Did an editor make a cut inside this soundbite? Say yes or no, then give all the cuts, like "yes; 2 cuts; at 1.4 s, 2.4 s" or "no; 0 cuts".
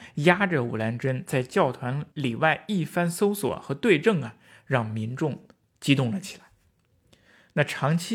no; 0 cuts